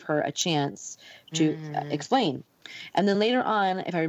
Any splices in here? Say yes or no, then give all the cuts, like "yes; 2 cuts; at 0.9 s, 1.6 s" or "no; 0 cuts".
no; 0 cuts